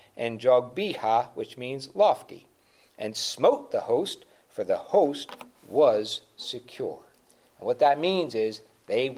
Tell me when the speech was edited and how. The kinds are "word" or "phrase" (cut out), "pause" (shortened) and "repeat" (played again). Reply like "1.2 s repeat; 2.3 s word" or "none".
none